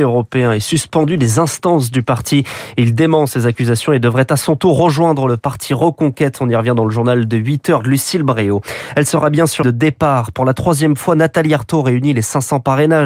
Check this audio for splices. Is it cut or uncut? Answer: cut